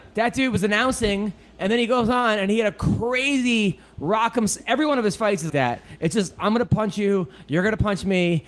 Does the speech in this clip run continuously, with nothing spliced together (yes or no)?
no